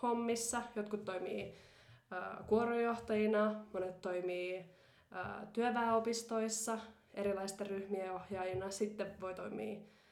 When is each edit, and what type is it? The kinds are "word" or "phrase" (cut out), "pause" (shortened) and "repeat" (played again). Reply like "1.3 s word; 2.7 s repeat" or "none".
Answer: none